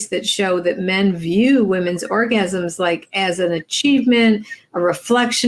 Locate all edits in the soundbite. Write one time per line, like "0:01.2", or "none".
none